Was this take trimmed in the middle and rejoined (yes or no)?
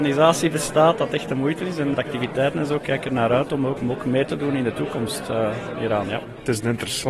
yes